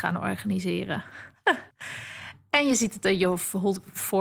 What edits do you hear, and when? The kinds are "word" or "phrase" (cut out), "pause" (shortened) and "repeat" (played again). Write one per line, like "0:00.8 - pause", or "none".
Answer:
0:01.7 - pause